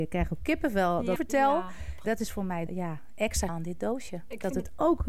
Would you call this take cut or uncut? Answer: cut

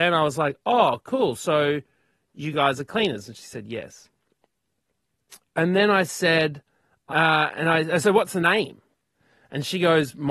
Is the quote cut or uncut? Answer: uncut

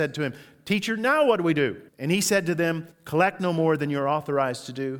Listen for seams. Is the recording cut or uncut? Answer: cut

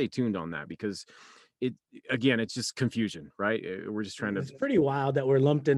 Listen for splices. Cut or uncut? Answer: uncut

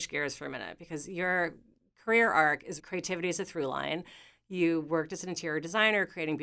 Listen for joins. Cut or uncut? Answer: cut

